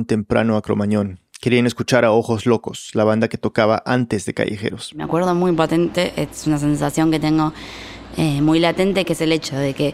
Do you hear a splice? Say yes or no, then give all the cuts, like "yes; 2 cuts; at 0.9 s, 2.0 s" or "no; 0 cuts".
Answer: no; 0 cuts